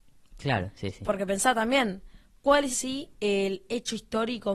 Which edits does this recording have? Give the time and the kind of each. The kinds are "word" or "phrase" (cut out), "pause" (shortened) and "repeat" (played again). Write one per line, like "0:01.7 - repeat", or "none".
0:02.7 - word